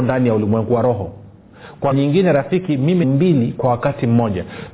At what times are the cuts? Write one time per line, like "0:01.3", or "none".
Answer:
0:01.9
0:03.0